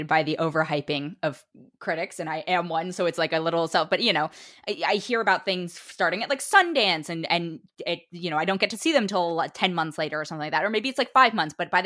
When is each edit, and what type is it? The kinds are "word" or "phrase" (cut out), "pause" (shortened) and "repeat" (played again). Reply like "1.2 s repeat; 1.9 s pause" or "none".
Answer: none